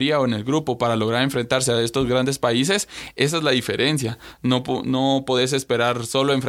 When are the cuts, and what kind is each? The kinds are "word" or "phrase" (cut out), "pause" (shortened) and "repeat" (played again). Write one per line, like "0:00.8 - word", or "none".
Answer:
none